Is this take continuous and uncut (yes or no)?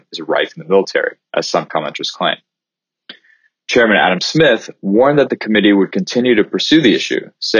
yes